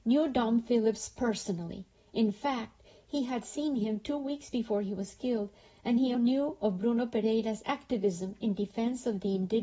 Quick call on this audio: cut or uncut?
cut